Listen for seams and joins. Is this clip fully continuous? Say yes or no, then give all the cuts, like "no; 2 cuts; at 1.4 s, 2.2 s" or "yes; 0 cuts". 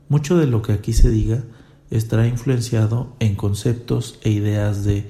yes; 0 cuts